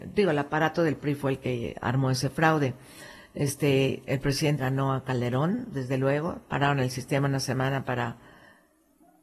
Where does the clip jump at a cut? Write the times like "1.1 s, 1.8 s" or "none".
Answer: 4.6 s